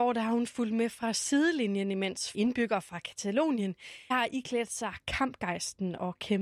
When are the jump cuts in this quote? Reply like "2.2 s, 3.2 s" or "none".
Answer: 2.3 s, 4.1 s